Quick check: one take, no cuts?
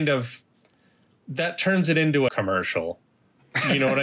no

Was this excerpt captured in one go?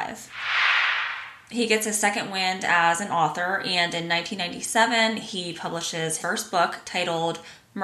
no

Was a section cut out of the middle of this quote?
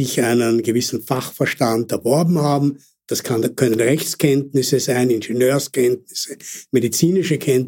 no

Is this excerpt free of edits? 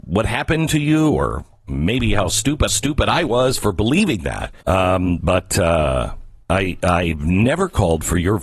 no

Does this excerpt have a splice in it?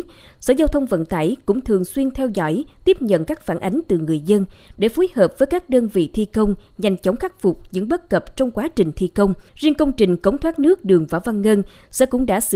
yes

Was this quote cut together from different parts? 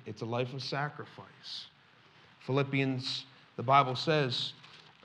no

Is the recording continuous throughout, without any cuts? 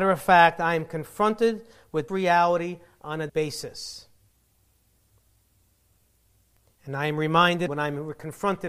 no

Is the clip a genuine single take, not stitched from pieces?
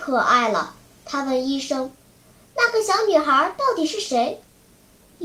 yes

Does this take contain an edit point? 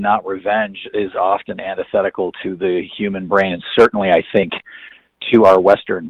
no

